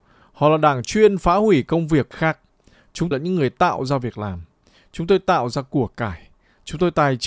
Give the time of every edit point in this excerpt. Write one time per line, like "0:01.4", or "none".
0:02.1
0:03.1

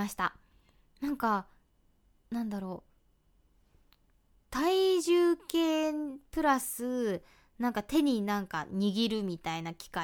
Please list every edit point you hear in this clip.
none

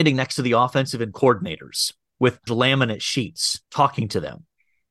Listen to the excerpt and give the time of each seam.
0:01.1
0:02.5
0:03.6

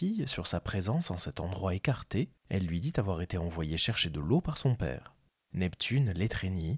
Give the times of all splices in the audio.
none

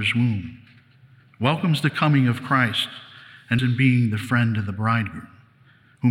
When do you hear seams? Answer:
0:03.6

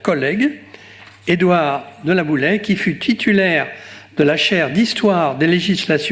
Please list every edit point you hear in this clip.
none

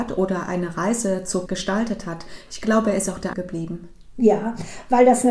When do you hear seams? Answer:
0:01.5
0:03.3

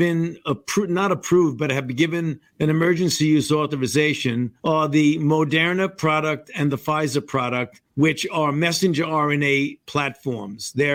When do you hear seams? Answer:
0:02.5
0:04.6
0:07.9

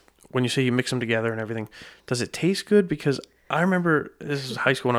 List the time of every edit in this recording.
none

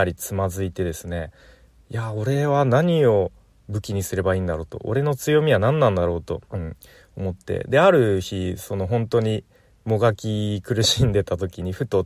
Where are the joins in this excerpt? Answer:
0:06.4

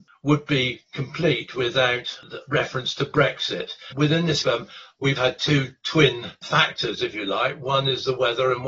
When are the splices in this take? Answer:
0:04.4
0:05.2

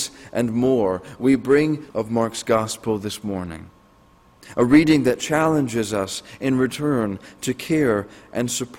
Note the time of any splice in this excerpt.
0:01.9

